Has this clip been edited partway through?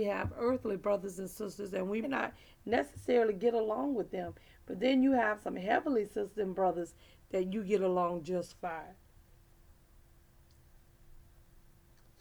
yes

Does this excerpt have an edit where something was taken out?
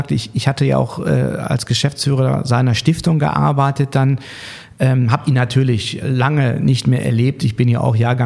yes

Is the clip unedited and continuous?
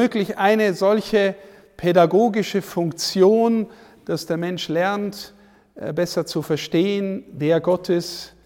yes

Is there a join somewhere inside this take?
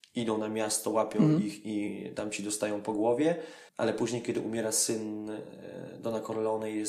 yes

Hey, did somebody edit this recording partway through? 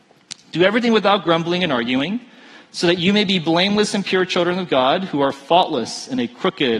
no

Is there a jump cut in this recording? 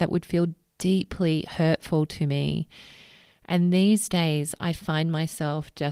no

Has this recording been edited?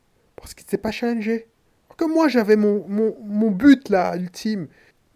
no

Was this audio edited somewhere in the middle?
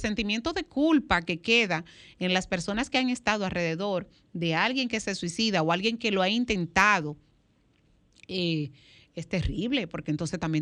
no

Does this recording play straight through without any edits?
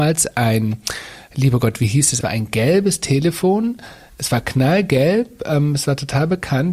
no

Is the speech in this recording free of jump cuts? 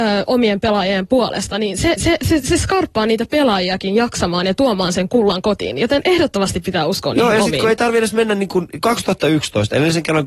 no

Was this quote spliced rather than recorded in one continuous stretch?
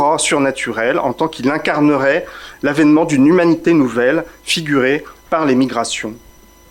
no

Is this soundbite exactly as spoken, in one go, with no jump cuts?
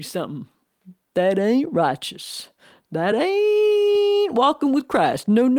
yes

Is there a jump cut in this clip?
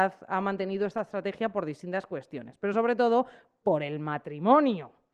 no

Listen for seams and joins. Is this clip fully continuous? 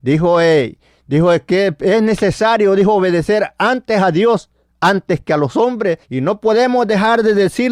no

